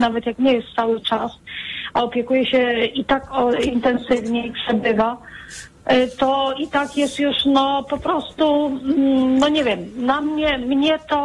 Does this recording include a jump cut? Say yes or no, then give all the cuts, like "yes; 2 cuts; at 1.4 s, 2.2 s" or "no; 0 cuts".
no; 0 cuts